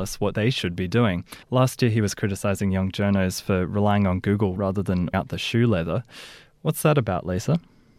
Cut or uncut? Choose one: cut